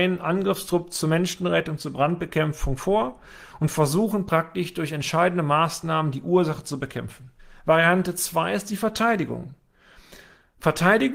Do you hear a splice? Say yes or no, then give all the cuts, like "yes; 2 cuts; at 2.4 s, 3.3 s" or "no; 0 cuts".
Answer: yes; 1 cut; at 7.4 s